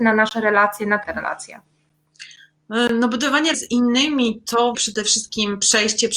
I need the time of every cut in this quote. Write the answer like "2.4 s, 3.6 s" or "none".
1.0 s, 3.5 s, 4.7 s